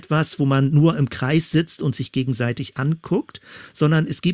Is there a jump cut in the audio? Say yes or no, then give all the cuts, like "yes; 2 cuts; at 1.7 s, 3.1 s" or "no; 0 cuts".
no; 0 cuts